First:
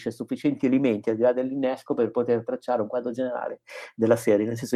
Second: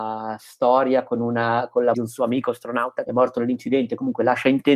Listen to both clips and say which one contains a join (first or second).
second